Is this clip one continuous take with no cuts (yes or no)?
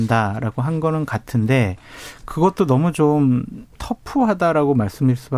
no